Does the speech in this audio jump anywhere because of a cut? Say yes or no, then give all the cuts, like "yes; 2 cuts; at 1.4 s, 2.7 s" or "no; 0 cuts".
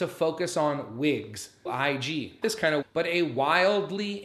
yes; 3 cuts; at 1.7 s, 2.4 s, 2.8 s